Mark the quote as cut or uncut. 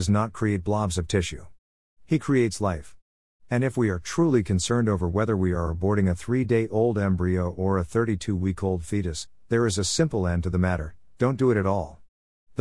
uncut